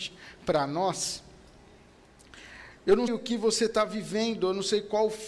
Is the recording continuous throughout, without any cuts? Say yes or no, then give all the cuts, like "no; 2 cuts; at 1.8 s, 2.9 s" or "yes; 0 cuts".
no; 2 cuts; at 2.8 s, 3.1 s